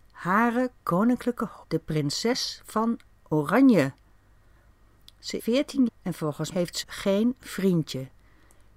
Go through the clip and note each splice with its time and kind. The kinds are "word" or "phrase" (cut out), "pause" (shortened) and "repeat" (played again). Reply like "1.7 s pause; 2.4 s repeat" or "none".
1.6 s word; 5.4 s word; 5.9 s word; 6.5 s word; 6.8 s word